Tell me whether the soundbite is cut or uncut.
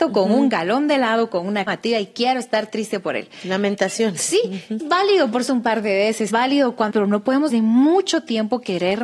cut